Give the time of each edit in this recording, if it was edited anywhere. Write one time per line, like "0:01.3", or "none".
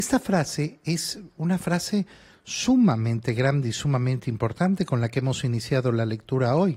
none